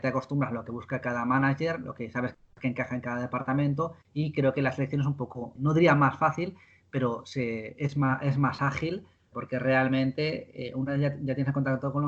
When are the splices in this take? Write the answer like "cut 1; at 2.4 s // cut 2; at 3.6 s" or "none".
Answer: cut 1; at 4.0 s // cut 2; at 5.6 s // cut 3; at 9.3 s